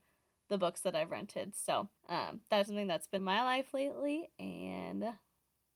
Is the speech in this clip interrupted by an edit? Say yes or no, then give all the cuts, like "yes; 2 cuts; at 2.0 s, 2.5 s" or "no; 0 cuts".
yes; 3 cuts; at 2.0 s, 2.7 s, 3.2 s